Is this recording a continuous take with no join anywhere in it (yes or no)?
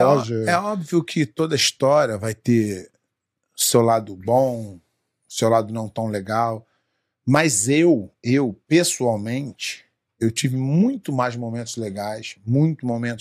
yes